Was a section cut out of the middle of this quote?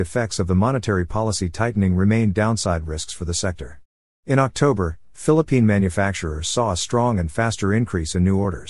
no; 0 cuts

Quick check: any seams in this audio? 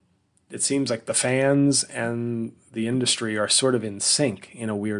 no; 0 cuts

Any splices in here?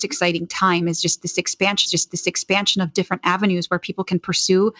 yes; 1 cut; at 1.9 s

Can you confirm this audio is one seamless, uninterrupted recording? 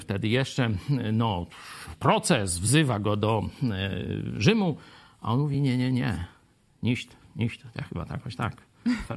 yes; 0 cuts

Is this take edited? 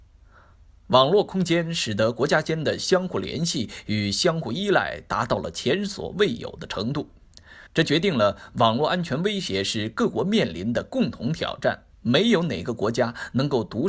yes; 2 cuts; at 7.7 s, 11.9 s

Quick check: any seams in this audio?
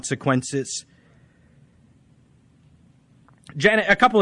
no; 0 cuts

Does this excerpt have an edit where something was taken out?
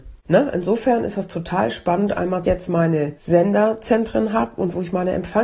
yes; 1 cut; at 2.4 s

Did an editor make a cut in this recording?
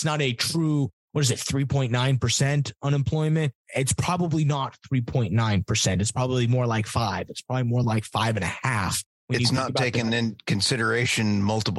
no; 0 cuts

